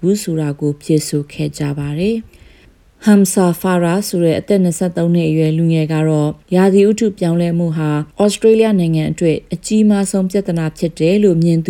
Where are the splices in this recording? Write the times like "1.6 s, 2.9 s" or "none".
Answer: 2.3 s, 6.4 s, 8.1 s

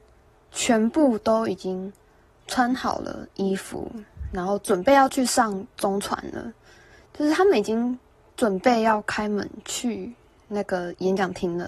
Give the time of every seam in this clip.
none

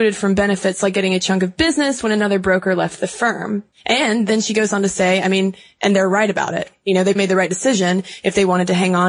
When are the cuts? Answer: 3.7 s, 7.2 s

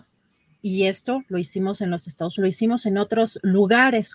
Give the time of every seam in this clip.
2.4 s

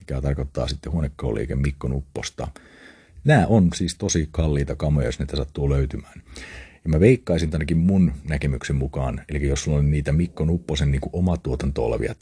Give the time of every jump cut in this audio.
none

